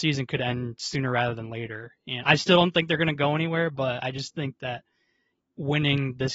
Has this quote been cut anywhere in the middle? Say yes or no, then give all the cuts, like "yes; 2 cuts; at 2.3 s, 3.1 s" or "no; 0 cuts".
no; 0 cuts